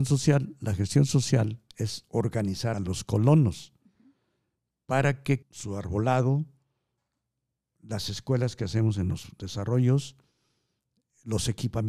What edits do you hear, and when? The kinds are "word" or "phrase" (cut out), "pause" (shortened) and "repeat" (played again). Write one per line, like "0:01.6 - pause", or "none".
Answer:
0:01.7 - pause
0:02.7 - phrase
0:05.4 - word